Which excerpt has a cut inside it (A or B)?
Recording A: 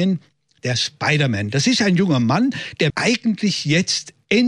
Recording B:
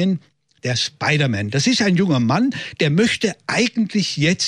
A